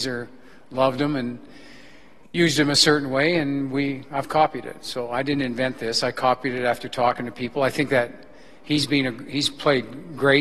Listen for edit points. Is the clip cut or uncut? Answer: uncut